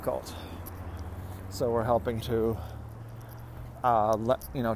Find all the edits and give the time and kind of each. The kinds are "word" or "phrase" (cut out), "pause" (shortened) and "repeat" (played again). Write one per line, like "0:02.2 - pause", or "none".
0:02.2 - word